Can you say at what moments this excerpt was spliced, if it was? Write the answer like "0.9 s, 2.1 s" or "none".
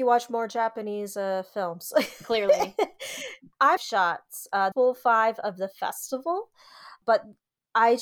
3.8 s, 4.7 s